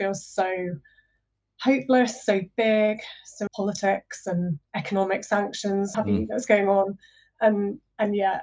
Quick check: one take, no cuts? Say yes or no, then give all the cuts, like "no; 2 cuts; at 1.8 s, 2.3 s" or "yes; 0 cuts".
no; 3 cuts; at 3.5 s, 4.7 s, 5.9 s